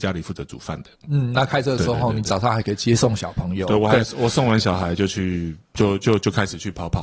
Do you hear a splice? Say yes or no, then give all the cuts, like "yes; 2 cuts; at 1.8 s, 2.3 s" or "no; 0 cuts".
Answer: yes; 1 cut; at 5.6 s